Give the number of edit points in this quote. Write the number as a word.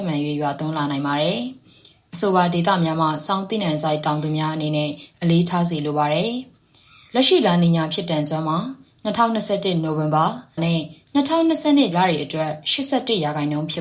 two